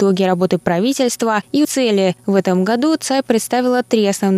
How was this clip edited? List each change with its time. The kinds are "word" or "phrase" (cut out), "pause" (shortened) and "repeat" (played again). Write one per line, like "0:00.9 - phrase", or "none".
0:01.6 - phrase